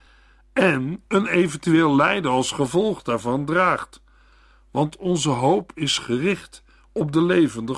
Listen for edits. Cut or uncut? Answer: uncut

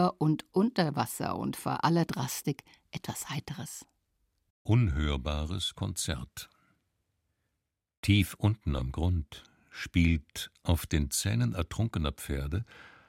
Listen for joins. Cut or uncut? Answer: uncut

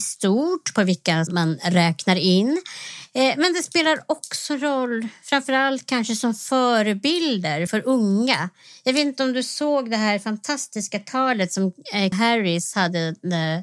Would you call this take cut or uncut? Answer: cut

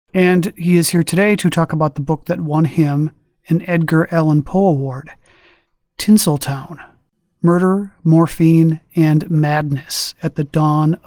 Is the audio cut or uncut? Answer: uncut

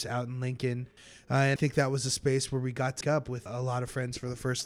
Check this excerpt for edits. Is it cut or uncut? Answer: cut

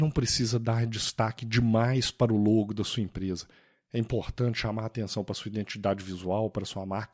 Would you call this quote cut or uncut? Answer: uncut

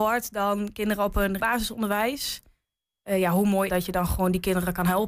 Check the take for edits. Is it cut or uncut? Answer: cut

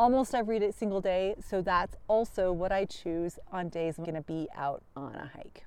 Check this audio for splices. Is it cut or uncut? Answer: cut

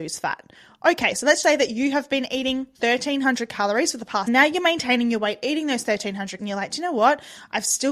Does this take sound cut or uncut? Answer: cut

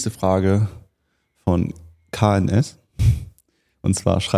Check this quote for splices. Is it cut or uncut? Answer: uncut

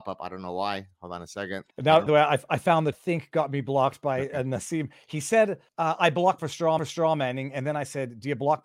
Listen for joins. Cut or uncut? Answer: cut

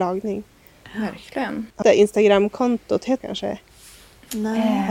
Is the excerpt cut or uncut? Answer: cut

